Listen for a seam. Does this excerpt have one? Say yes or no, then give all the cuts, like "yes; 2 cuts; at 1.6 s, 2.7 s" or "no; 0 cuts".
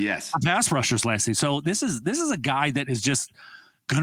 no; 0 cuts